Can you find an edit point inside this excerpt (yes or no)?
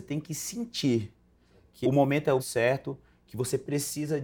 yes